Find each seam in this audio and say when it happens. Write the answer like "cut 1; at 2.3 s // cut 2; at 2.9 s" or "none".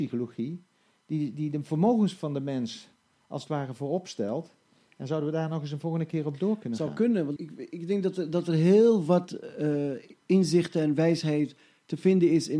cut 1; at 7.4 s